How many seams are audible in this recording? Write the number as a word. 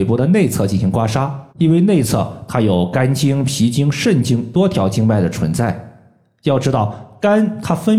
one